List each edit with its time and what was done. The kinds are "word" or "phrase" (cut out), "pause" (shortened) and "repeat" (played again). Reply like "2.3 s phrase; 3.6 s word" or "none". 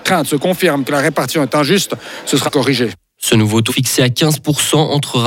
2.5 s word; 3.7 s word